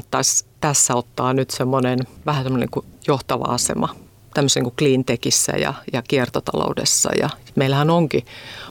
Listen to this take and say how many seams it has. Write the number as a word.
one